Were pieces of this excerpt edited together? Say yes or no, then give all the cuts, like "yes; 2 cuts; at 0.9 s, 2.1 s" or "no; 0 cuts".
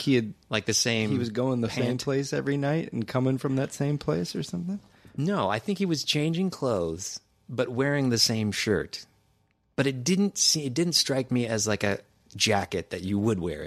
no; 0 cuts